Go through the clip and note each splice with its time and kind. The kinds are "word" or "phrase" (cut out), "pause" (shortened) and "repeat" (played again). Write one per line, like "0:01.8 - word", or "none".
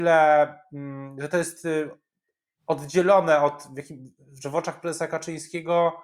none